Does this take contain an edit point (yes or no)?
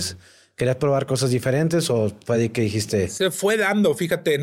no